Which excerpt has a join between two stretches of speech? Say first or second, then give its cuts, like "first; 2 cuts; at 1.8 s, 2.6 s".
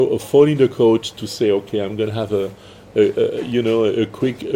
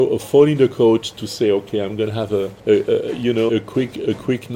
second; 2 cuts; at 2.6 s, 3.5 s